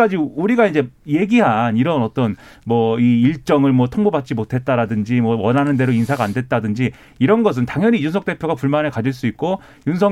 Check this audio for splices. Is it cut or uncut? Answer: uncut